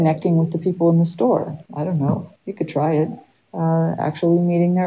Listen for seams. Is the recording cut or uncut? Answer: cut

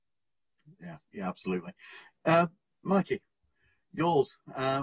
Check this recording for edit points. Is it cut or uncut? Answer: uncut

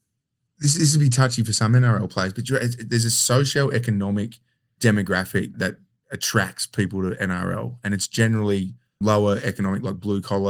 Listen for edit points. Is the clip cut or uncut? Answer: cut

